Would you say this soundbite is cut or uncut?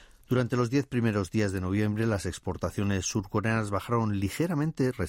uncut